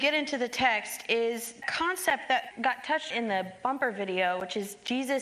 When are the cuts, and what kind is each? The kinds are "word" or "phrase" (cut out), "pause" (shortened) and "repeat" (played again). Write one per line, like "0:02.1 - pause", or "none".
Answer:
0:01.6 - word
0:02.5 - word
0:03.1 - word